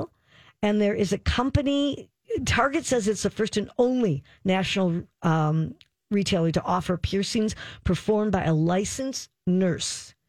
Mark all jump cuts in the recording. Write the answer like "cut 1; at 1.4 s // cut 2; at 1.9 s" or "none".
none